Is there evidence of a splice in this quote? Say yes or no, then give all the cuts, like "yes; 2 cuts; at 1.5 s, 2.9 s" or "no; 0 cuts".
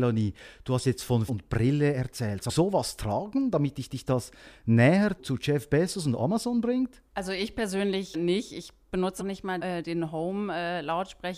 yes; 8 cuts; at 1.3 s, 2.5 s, 3.9 s, 5.2 s, 7.1 s, 8.1 s, 9.2 s, 9.6 s